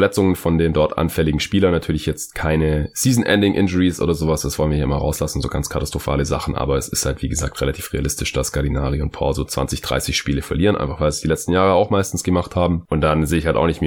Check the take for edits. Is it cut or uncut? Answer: uncut